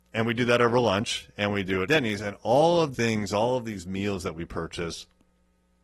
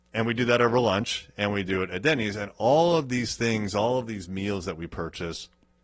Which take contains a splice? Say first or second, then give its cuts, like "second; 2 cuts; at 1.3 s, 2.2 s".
first; 2 cuts; at 1.9 s, 2.9 s